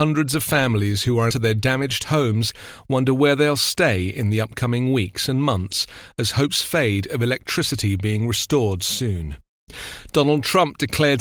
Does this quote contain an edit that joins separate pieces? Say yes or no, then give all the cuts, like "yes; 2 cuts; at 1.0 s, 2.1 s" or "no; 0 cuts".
yes; 1 cut; at 1.3 s